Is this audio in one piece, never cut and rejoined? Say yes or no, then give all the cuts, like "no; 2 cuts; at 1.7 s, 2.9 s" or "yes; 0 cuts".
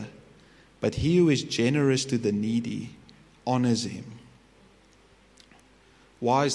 yes; 0 cuts